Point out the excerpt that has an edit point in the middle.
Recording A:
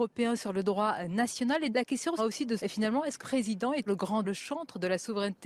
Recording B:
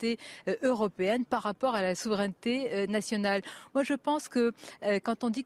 A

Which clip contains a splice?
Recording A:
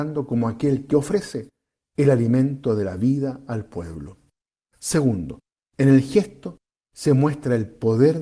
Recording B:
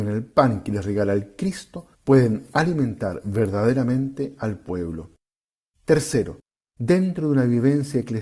B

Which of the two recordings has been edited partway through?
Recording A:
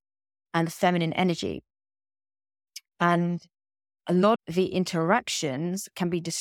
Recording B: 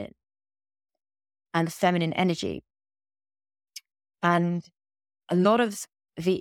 A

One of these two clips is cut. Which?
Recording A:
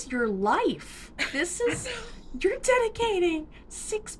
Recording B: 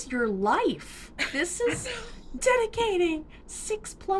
B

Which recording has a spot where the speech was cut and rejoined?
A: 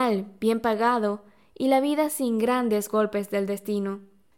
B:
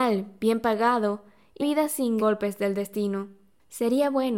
B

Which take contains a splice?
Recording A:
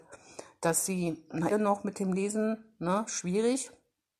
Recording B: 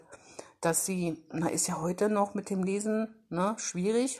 A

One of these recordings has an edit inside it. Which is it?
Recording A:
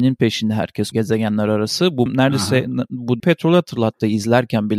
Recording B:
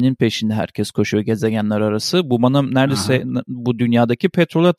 A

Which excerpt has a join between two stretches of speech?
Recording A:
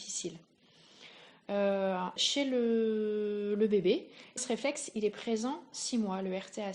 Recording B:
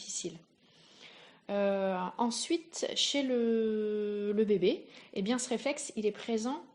A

